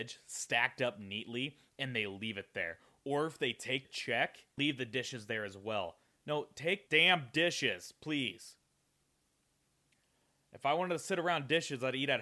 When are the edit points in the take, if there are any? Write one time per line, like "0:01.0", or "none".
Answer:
0:03.8
0:04.6
0:06.9